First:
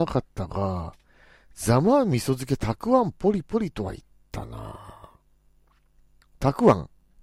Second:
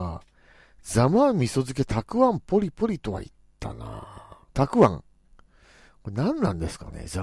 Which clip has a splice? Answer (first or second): second